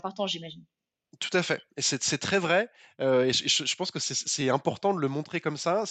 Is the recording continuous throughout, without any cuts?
yes; 0 cuts

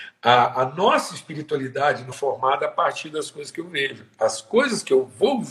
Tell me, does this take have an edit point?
yes; 1 cut; at 2.1 s

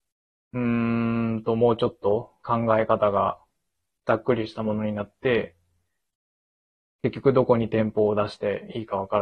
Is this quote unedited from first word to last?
yes; 0 cuts

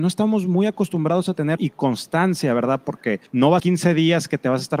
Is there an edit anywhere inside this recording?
yes; 3 cuts; at 1.6 s, 3.3 s, 3.6 s

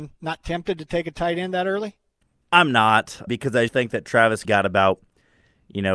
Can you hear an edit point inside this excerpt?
yes; 4 cuts; at 2.2 s, 3.3 s, 3.7 s, 4.4 s

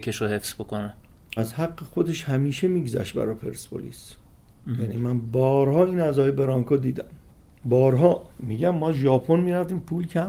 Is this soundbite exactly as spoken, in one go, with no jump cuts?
no; 2 cuts; at 1.4 s, 8.3 s

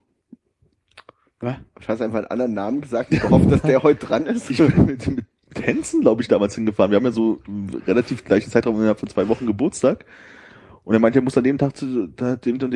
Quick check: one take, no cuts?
yes; 0 cuts

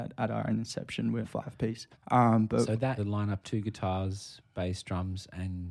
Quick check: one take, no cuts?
no; 4 cuts; at 1.2 s, 1.9 s, 3.0 s, 3.4 s

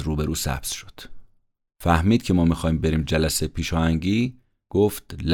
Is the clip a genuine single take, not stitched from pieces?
yes; 0 cuts

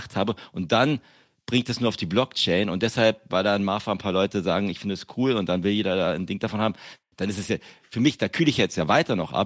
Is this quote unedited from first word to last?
yes; 0 cuts

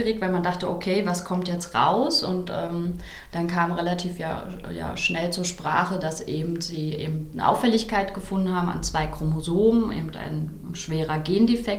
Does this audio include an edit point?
no; 0 cuts

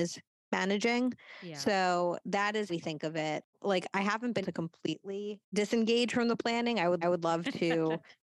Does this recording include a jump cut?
yes; 5 cuts; at 2.7 s, 3.5 s, 4.4 s, 5.4 s, 7.0 s

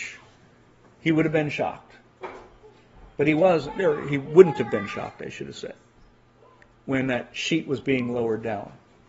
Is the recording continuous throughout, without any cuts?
yes; 0 cuts

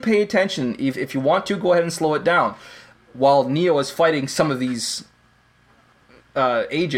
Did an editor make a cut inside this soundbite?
no; 0 cuts

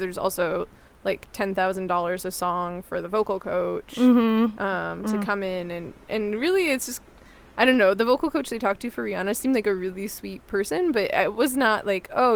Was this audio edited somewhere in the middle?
no; 0 cuts

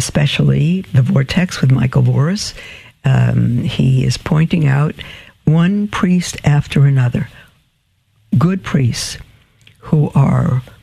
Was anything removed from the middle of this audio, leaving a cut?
no; 0 cuts

